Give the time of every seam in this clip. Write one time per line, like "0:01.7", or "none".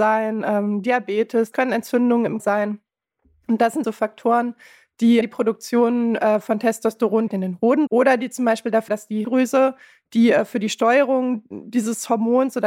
0:01.5
0:02.4
0:03.8
0:05.2
0:07.3
0:07.9
0:08.9
0:09.2